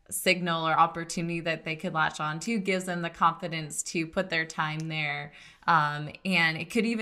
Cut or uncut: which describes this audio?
uncut